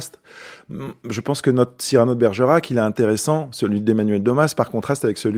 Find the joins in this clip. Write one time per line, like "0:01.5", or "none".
none